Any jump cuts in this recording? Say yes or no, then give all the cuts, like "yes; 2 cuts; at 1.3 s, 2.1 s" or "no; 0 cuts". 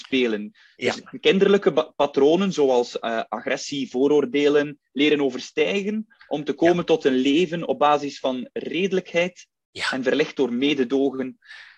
no; 0 cuts